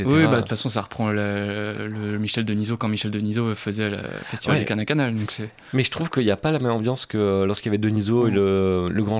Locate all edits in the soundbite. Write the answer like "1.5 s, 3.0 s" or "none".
none